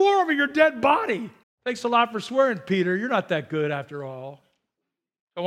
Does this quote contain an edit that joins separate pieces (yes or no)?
yes